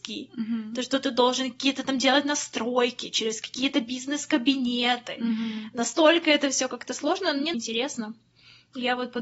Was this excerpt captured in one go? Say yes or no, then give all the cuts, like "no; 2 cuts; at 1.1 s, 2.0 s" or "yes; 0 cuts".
no; 1 cut; at 7.5 s